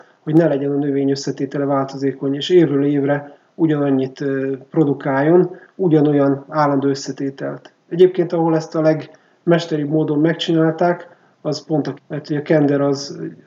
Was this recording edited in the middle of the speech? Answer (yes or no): yes